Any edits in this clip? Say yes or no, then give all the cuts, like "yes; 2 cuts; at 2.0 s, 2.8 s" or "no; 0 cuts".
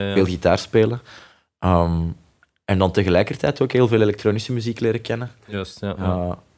no; 0 cuts